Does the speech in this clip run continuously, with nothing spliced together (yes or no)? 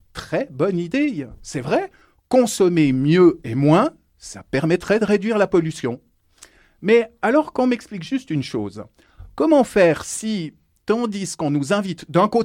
yes